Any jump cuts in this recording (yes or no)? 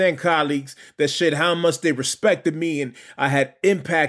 no